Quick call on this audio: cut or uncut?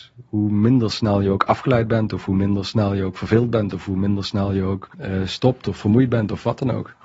cut